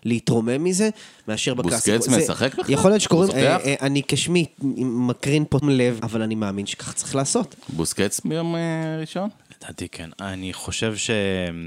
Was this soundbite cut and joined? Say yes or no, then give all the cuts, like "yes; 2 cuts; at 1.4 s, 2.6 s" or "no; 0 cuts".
yes; 4 cuts; at 3.3 s, 5.6 s, 6.0 s, 8.2 s